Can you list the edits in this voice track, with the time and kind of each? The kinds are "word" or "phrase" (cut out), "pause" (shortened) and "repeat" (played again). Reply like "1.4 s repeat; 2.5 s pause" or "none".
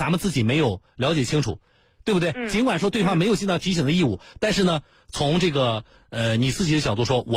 none